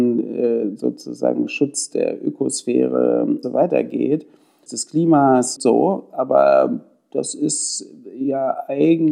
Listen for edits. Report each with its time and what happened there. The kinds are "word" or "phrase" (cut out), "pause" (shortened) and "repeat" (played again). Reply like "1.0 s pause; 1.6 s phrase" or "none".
3.4 s word; 4.7 s phrase; 5.6 s word